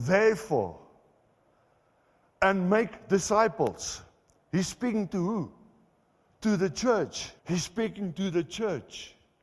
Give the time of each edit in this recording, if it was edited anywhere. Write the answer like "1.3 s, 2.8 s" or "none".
7.4 s